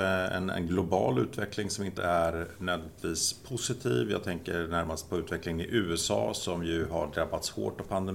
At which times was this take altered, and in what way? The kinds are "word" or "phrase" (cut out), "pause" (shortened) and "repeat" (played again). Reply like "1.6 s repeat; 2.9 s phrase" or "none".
2.0 s word